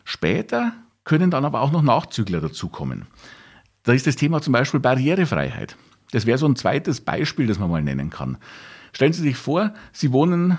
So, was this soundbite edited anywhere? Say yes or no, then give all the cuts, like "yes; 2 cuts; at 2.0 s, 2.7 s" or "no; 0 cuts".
no; 0 cuts